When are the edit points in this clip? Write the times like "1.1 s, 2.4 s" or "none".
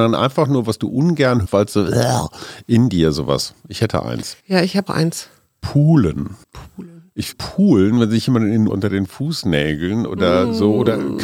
1.4 s, 4.4 s, 4.9 s, 6.4 s, 7.3 s, 8.7 s